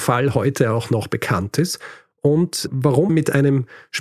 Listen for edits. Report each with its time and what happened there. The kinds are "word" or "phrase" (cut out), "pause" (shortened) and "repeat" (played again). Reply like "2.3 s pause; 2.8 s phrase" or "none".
3.1 s word

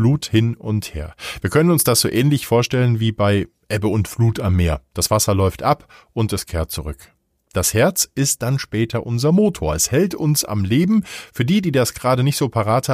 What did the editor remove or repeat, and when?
none

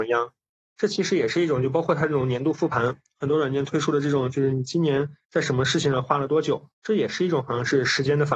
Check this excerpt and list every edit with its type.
5.2 s pause; 6.7 s pause

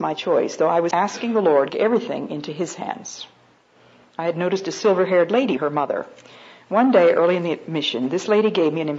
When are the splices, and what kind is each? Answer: 0.9 s word; 1.7 s phrase; 5.6 s phrase

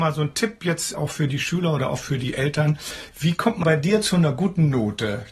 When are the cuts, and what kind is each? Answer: 0.9 s word; 3.6 s word

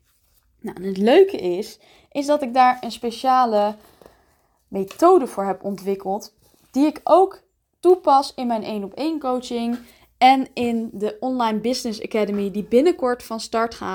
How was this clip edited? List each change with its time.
none

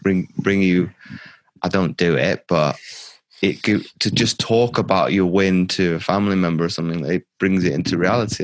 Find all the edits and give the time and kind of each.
none

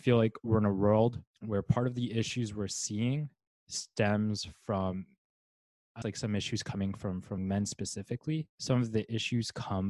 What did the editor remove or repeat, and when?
1.3 s pause; 3.5 s pause; 6.0 s word; 7.4 s word; 8.5 s pause

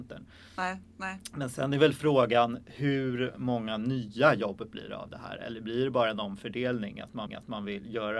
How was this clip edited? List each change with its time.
7.3 s repeat

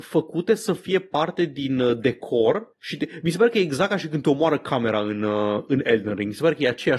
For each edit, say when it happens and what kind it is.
none

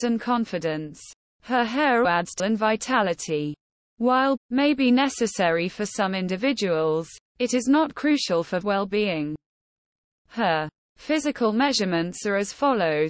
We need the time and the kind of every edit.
2.0 s word; 2.4 s phrase; 4.4 s word; 8.6 s phrase

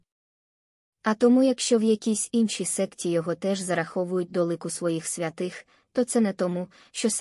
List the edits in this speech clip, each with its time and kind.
none

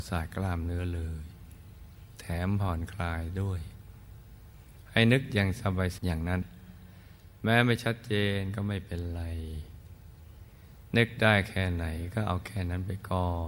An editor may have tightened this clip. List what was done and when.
6.0 s phrase

